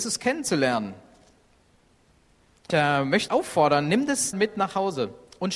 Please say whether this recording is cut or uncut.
cut